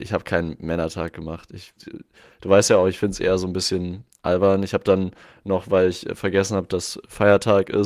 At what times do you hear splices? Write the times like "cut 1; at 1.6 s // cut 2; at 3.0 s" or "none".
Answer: cut 1; at 1.8 s